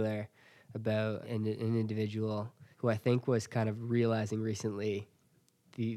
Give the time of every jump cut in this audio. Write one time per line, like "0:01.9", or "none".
0:01.2
0:02.7